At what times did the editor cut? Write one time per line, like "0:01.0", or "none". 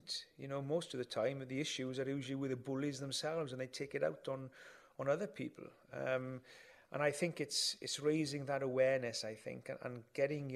none